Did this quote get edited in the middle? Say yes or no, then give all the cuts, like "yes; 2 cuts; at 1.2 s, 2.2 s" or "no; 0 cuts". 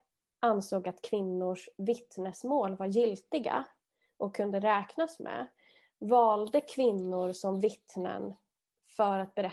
no; 0 cuts